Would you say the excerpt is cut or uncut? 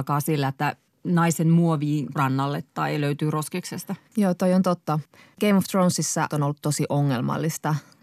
cut